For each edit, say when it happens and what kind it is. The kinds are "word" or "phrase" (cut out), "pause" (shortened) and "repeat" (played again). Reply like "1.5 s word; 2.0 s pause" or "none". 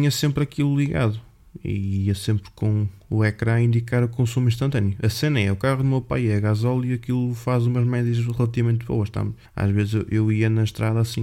9.4 s pause